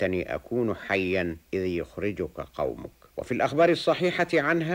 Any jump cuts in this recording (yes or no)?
yes